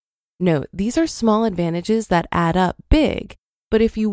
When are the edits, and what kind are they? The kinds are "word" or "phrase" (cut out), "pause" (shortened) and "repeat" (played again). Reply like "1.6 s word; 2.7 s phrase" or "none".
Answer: none